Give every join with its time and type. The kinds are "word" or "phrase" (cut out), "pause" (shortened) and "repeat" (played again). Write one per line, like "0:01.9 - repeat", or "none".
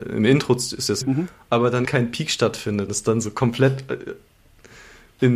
0:01.0 - phrase
0:01.8 - word
0:02.9 - word